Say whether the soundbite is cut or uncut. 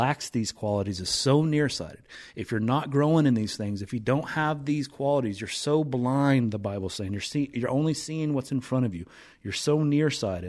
uncut